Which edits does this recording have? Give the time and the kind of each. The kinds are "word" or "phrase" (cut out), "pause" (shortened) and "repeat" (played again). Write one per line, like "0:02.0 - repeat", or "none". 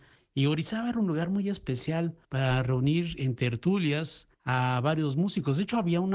0:02.2 - pause
0:04.3 - pause